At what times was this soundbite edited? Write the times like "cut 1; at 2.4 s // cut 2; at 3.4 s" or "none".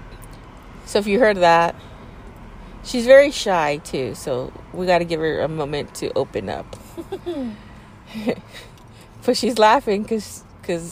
none